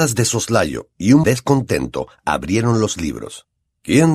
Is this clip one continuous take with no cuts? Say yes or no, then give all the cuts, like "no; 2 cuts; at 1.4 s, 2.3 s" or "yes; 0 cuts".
no; 1 cut; at 1.2 s